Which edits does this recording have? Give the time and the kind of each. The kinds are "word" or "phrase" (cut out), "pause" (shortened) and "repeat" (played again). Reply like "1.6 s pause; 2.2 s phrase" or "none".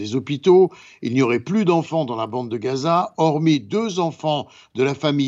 none